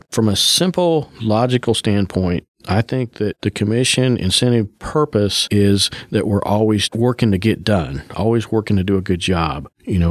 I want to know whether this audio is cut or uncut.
uncut